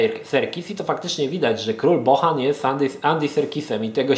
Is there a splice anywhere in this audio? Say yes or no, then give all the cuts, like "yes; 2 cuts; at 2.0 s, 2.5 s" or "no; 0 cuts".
no; 0 cuts